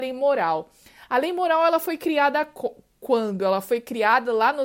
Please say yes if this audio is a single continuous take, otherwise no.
yes